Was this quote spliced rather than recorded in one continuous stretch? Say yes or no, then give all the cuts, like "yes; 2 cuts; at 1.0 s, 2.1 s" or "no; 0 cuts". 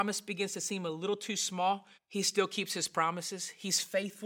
yes; 1 cut; at 1.9 s